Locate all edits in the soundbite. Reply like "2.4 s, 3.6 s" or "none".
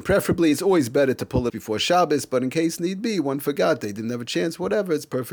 1.5 s